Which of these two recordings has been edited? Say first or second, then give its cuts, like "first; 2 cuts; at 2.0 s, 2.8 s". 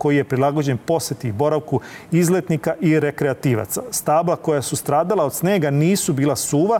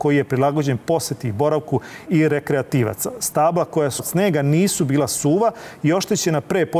second; 2 cuts; at 2.1 s, 4.0 s